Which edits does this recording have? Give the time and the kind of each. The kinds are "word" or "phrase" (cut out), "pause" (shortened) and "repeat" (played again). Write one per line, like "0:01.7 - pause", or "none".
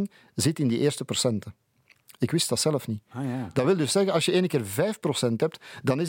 none

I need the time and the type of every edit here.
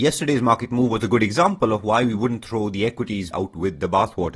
0:03.3 - word

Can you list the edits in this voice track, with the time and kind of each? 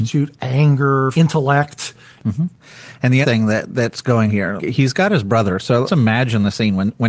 0:01.1 - word
0:03.2 - word
0:04.3 - word
0:04.6 - word
0:05.8 - word

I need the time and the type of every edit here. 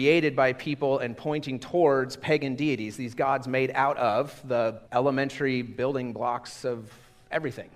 0:04.9 - pause

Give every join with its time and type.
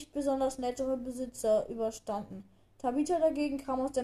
none

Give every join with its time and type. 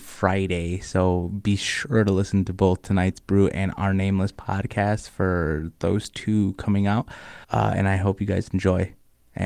0:07.4 - pause

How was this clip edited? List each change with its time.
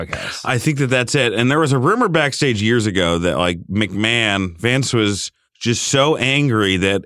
0:05.5 - pause

